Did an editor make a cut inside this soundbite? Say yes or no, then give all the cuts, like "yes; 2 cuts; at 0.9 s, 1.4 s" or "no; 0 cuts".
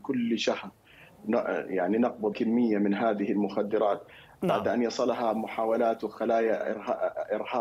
yes; 1 cut; at 2.3 s